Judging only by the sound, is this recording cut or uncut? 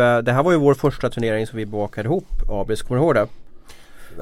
uncut